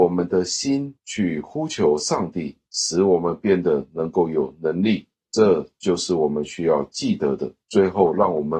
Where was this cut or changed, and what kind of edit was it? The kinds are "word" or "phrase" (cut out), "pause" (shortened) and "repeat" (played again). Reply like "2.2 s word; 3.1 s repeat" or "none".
1.0 s pause; 7.6 s pause